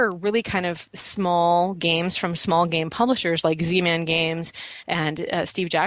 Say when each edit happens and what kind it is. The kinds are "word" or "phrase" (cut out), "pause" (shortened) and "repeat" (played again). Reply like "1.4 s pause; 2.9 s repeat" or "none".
none